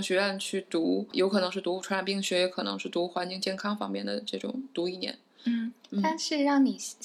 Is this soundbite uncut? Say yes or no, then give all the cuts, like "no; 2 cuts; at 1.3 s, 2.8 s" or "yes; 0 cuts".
yes; 0 cuts